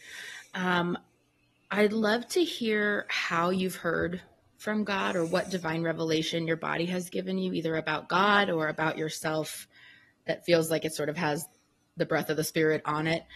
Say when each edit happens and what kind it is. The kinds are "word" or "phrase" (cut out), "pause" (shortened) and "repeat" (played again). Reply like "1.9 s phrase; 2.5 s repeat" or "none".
none